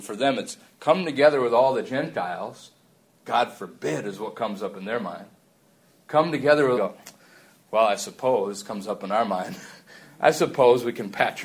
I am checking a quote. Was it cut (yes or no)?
yes